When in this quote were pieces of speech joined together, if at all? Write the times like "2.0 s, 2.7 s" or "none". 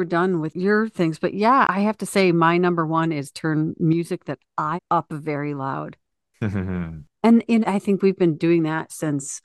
4.8 s, 7.6 s